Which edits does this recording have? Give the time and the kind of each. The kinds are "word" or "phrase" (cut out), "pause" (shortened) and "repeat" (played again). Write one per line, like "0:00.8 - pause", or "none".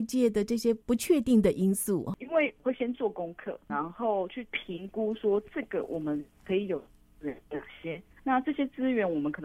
0:03.7 - word
0:07.4 - pause
0:08.1 - pause